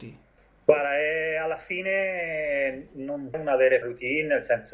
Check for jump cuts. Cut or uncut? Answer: cut